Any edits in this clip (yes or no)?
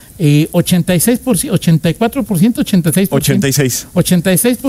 no